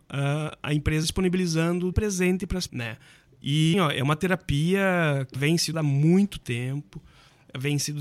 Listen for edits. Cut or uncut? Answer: cut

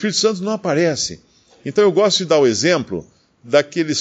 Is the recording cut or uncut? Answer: uncut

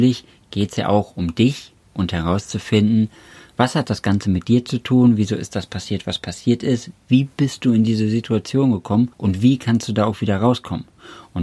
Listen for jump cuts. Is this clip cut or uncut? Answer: cut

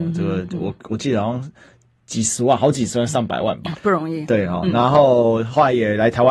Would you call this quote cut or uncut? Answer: cut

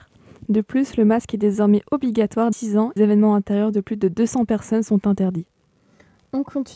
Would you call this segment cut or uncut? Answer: cut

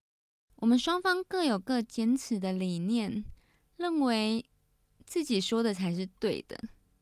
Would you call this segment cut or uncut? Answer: uncut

